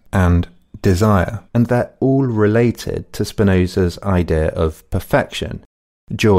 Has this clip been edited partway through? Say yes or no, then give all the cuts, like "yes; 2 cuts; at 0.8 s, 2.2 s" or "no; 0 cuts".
yes; 1 cut; at 1.5 s